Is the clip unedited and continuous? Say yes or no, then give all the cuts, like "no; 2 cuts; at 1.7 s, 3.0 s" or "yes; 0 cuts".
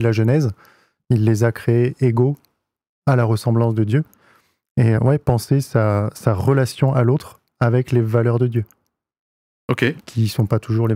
no; 1 cut; at 5.0 s